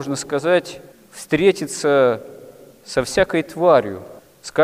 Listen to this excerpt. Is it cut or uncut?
uncut